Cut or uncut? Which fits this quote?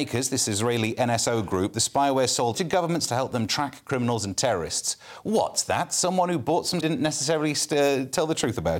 cut